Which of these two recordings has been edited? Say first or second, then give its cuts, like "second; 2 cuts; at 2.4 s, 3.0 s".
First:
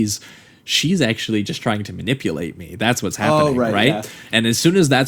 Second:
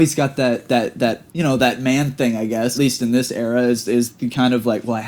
second; 2 cuts; at 1.3 s, 2.7 s